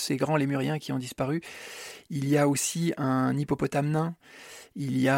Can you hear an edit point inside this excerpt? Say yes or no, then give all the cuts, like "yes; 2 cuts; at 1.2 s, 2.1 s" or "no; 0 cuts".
no; 0 cuts